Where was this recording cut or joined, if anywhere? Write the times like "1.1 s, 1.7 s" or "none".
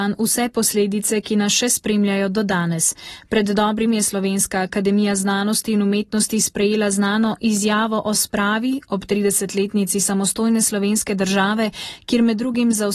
3.9 s